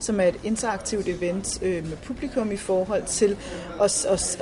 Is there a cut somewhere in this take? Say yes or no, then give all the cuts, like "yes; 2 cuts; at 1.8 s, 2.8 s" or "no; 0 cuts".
no; 0 cuts